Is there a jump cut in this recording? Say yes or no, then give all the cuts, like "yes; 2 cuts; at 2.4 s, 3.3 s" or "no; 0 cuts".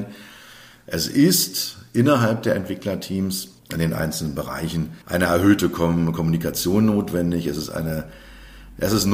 yes; 2 cuts; at 3.6 s, 5.0 s